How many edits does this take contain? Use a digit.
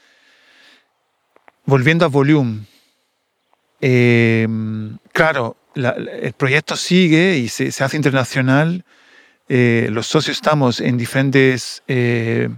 1